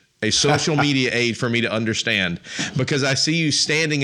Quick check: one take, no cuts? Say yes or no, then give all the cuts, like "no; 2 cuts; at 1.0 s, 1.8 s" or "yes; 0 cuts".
yes; 0 cuts